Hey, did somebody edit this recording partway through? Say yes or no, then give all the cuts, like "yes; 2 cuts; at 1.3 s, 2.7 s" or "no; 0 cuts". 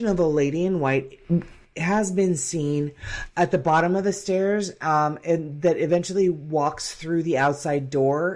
no; 0 cuts